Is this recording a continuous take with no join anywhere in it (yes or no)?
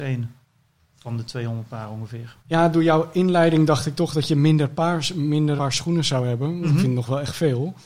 no